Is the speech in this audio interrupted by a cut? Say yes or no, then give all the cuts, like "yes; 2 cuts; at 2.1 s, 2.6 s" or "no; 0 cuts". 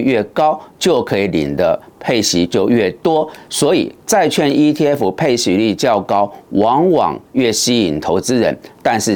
no; 0 cuts